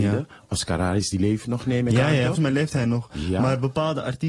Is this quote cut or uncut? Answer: cut